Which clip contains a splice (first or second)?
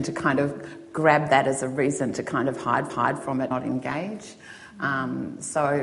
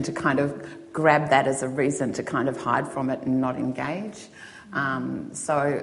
first